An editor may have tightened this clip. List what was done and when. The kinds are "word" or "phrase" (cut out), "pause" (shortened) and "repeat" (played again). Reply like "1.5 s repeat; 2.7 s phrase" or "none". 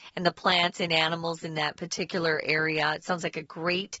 none

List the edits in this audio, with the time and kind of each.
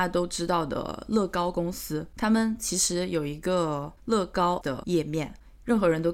4.6 s word

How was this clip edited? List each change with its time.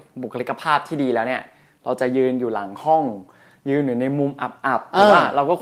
none

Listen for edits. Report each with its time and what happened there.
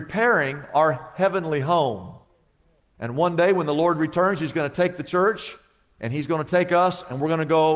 none

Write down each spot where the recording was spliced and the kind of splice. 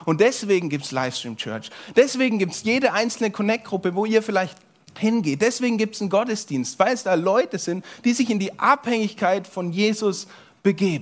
none

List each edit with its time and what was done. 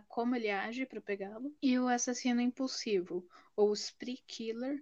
1.6 s pause

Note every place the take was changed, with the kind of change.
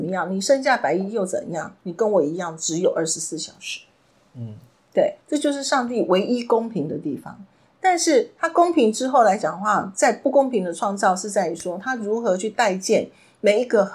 5.2 s pause

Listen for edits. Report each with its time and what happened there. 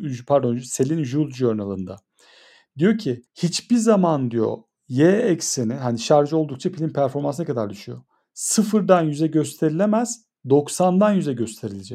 3.3 s pause

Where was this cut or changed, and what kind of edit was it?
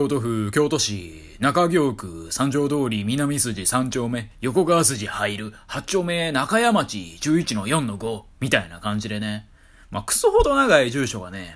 8.3 s pause

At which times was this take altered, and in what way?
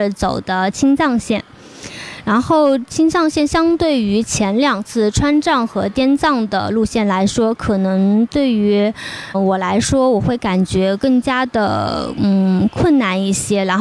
9.3 s word

